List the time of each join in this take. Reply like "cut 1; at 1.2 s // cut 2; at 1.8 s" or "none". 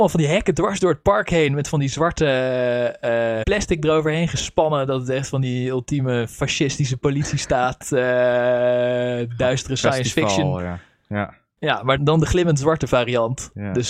cut 1; at 3.4 s // cut 2; at 12.0 s